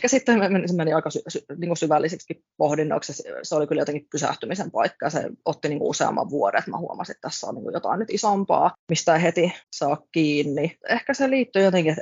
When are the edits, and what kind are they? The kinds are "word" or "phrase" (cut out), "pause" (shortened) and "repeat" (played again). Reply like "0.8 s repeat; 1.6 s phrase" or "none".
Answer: 9.6 s pause; 10.8 s pause